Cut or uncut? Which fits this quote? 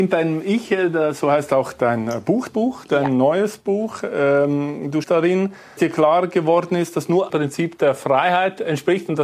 cut